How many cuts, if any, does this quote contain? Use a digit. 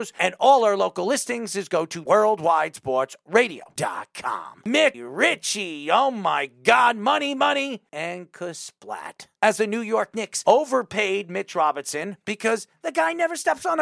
1